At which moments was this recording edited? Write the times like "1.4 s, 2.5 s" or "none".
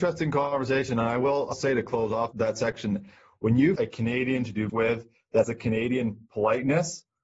1.5 s, 2.3 s, 3.8 s, 4.7 s, 5.4 s